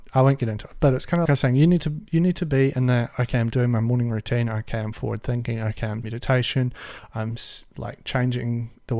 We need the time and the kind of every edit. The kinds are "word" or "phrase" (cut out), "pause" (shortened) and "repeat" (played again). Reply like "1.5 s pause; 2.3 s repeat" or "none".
1.3 s phrase; 6.0 s word